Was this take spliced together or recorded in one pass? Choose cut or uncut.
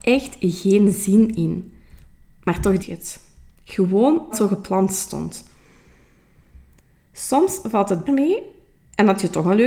cut